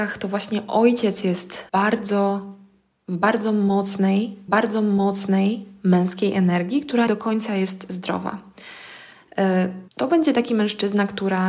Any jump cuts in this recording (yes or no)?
yes